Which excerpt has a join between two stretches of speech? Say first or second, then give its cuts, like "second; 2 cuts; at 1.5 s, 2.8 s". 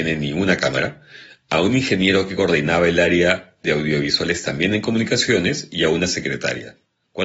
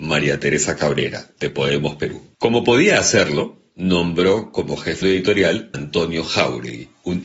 second; 3 cuts; at 2.3 s, 5.0 s, 5.7 s